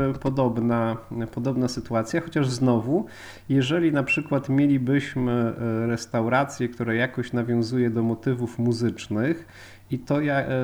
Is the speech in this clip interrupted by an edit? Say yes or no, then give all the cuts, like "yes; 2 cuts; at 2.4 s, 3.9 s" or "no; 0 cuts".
no; 0 cuts